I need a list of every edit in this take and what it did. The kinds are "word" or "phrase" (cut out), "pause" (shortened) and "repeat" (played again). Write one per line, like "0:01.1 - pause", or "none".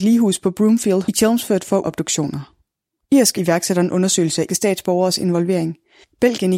0:01.0 - word
0:01.8 - word
0:03.4 - word
0:04.5 - word